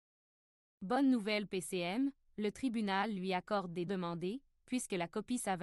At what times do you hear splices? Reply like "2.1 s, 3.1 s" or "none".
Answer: 1.5 s, 3.9 s